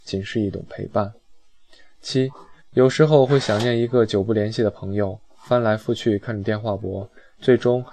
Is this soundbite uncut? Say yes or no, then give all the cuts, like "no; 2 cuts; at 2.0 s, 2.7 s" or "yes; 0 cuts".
no; 1 cut; at 2.6 s